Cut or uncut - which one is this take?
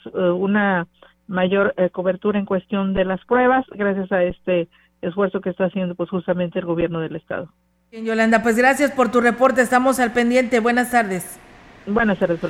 uncut